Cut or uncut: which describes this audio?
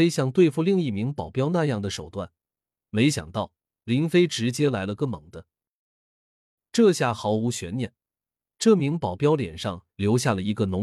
uncut